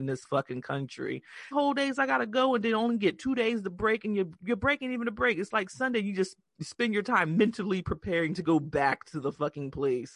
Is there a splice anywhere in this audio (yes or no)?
yes